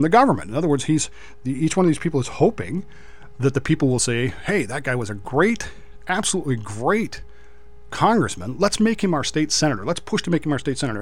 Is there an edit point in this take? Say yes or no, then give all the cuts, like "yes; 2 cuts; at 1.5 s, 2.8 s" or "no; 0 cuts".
no; 0 cuts